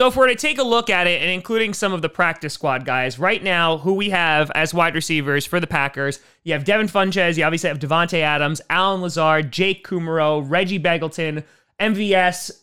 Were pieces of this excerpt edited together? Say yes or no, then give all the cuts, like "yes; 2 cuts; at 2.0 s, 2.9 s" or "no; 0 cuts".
no; 0 cuts